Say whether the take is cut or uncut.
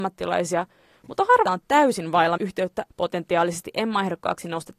cut